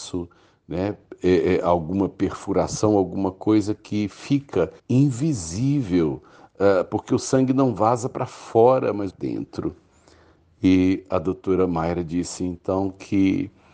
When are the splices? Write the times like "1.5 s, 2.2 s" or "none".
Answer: 4.8 s, 9.1 s